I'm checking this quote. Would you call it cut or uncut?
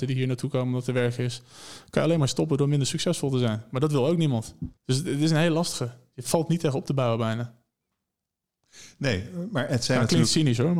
cut